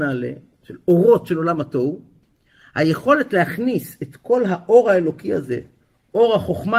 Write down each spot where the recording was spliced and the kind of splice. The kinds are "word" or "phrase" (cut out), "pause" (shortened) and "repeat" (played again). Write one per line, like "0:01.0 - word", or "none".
none